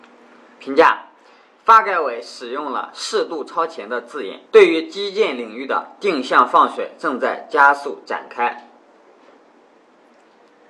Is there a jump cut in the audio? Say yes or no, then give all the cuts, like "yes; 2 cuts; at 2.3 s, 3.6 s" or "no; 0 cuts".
yes; 1 cut; at 4.4 s